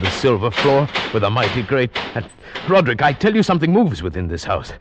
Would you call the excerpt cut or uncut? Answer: uncut